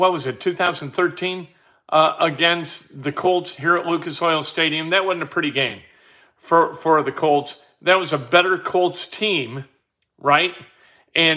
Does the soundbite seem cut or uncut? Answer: uncut